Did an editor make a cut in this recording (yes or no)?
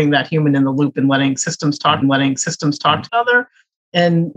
yes